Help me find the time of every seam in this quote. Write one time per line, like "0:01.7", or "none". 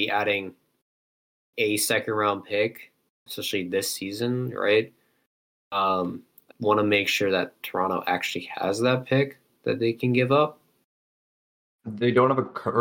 0:01.5
0:03.3
0:06.5